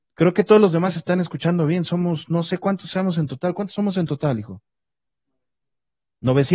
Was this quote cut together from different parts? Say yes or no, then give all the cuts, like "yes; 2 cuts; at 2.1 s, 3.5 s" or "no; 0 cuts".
no; 0 cuts